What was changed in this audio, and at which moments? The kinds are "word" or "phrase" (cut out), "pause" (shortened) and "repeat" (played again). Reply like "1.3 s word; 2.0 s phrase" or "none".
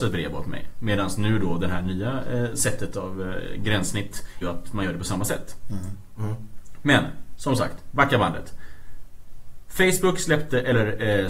4.4 s phrase